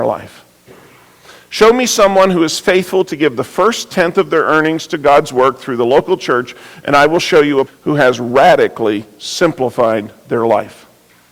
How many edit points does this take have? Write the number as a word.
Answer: one